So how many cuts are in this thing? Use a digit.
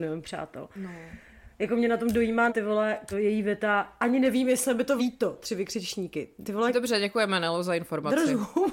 3